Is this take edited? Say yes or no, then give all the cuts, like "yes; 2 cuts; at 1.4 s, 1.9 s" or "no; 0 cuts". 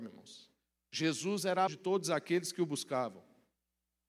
yes; 1 cut; at 1.7 s